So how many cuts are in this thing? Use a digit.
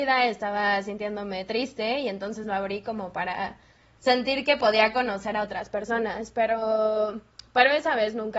0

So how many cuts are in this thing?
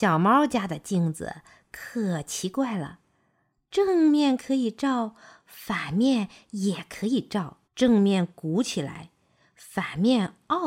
1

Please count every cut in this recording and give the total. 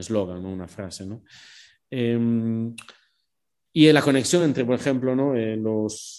0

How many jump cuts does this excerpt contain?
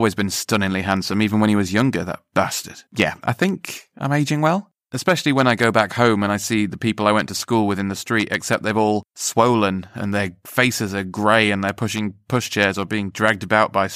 1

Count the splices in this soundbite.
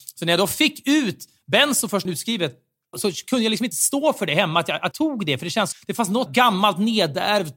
6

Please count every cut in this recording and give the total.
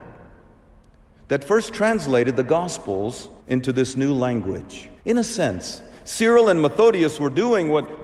2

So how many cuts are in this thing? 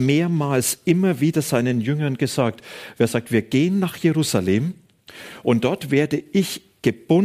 0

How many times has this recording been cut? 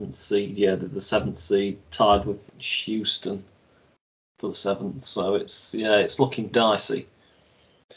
2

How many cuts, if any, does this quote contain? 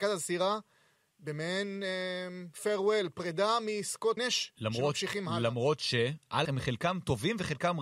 3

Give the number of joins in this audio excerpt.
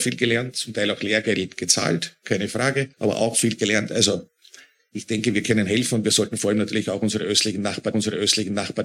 2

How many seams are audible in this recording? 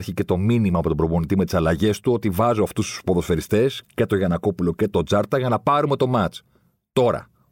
1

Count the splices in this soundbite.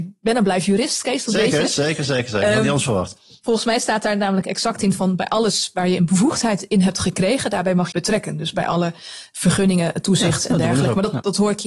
1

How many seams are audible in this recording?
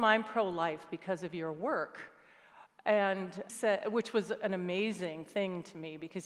1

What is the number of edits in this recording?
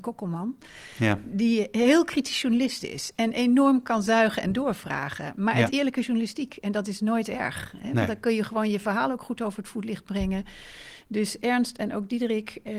1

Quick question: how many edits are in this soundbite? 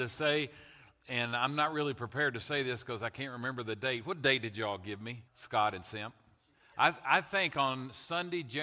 2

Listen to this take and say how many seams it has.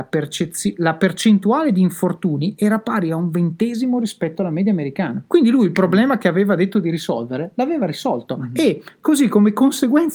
1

